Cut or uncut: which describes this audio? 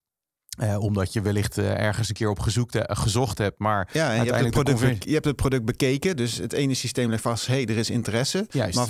uncut